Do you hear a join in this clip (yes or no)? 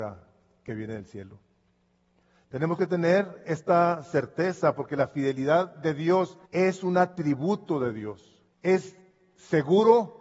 yes